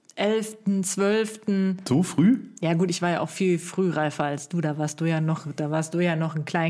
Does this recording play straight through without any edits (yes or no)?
yes